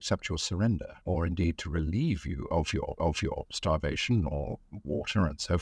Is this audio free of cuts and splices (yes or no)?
no